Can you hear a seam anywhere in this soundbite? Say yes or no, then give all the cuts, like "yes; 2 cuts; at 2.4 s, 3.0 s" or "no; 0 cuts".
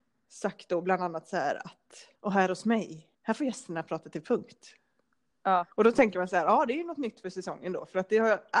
yes; 3 cuts; at 2.2 s, 3.1 s, 5.7 s